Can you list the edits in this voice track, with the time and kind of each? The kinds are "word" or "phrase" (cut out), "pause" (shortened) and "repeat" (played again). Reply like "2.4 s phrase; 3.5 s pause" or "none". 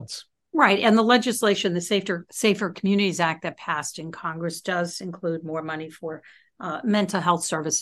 none